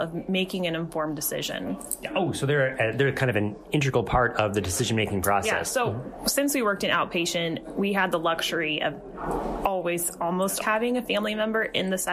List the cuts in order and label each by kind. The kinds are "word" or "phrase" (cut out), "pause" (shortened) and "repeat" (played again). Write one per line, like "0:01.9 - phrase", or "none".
0:10.6 - word